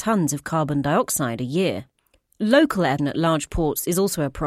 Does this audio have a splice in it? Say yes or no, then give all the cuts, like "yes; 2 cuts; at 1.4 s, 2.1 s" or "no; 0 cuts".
yes; 1 cut; at 3.0 s